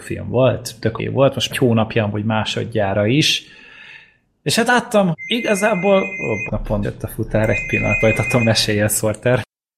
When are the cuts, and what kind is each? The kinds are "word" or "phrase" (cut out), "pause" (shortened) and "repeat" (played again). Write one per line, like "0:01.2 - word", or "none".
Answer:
0:01.0 - word
0:01.5 - word
0:04.7 - word
0:05.1 - word
0:06.5 - word
0:06.8 - word
0:08.0 - word
0:08.4 - word